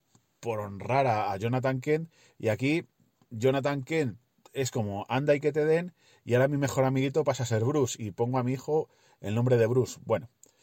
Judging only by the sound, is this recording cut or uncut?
uncut